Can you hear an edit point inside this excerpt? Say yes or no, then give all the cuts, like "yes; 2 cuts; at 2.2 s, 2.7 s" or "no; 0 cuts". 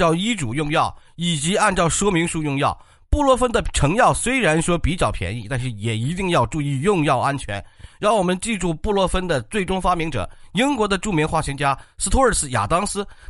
no; 0 cuts